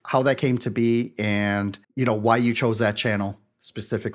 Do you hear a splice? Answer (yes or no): yes